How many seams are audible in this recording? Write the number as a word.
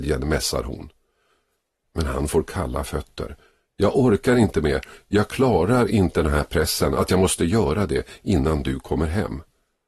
zero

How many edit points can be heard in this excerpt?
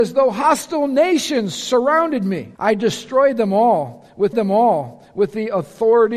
two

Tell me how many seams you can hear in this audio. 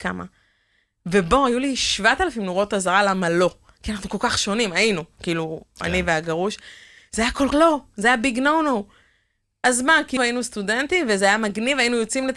two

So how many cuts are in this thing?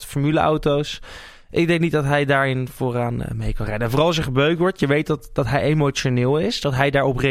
zero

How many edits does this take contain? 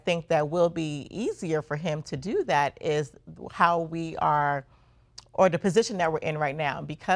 zero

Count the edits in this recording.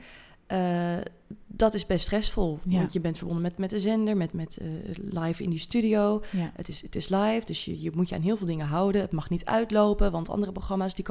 one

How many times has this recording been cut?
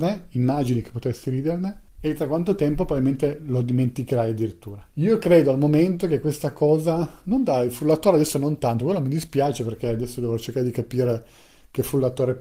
two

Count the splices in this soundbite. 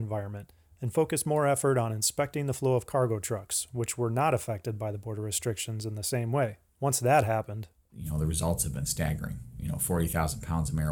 one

